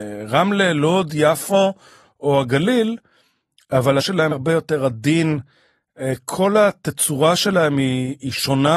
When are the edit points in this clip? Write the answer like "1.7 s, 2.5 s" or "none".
4.0 s, 4.3 s